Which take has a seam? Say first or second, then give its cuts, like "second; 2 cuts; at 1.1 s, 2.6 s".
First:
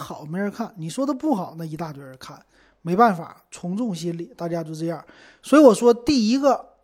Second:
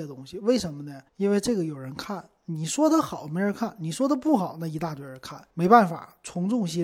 second; 2 cuts; at 1.1 s, 5.5 s